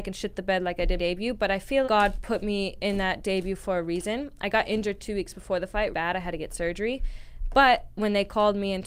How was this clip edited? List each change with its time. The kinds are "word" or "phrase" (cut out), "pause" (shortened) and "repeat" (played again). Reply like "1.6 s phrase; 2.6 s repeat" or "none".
1.0 s word; 1.8 s word; 5.9 s word

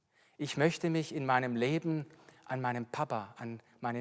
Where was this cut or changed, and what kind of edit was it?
none

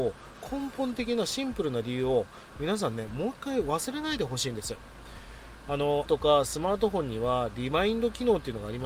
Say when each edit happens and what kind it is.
6.1 s word

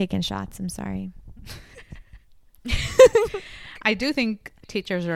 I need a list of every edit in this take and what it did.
none

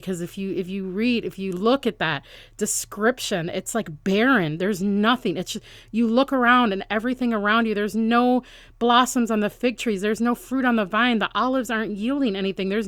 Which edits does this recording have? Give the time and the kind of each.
none

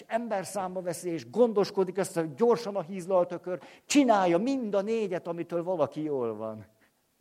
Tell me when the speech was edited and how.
none

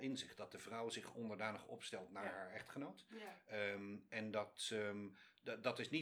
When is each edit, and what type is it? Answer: none

